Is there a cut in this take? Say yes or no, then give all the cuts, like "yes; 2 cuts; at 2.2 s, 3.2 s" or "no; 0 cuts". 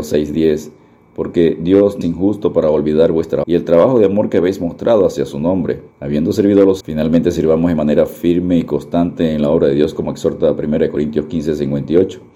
yes; 4 cuts; at 2.0 s, 3.4 s, 5.9 s, 6.8 s